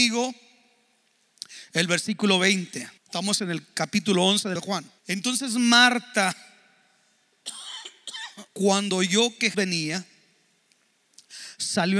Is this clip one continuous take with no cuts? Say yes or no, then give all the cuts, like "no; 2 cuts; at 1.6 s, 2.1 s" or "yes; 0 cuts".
no; 5 cuts; at 3.0 s, 4.6 s, 5.0 s, 8.5 s, 9.5 s